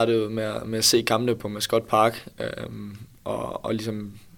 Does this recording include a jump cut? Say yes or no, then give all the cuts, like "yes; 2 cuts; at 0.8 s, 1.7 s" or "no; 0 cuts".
no; 0 cuts